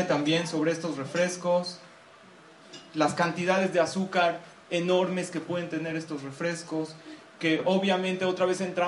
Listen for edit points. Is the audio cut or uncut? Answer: uncut